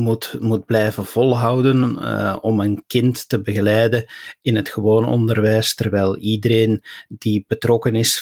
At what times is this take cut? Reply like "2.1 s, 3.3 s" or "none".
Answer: none